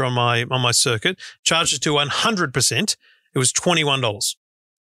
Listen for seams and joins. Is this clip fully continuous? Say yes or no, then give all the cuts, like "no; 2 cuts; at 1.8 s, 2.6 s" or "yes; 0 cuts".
yes; 0 cuts